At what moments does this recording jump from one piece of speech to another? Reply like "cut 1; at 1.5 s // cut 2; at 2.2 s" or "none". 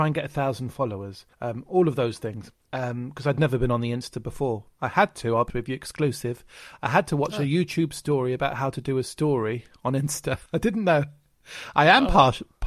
cut 1; at 1.3 s // cut 2; at 2.6 s // cut 3; at 5.5 s // cut 4; at 10.5 s